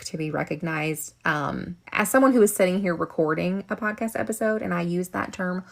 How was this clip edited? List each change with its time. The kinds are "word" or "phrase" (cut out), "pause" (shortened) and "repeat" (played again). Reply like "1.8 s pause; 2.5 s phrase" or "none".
1.8 s pause